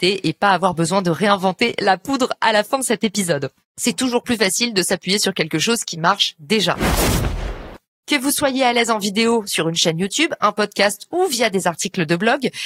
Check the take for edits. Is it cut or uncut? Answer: uncut